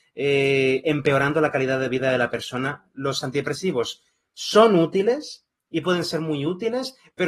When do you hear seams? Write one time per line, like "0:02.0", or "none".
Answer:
none